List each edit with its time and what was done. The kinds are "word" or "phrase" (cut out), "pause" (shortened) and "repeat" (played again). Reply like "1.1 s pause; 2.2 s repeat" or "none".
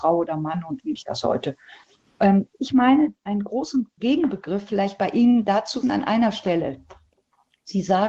1.0 s word; 2.5 s word; 3.9 s pause; 5.8 s word